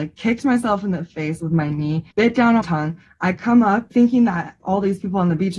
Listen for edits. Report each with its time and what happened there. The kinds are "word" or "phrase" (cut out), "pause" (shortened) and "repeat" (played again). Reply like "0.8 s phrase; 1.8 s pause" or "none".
2.1 s pause; 2.6 s word; 3.9 s word; 4.6 s word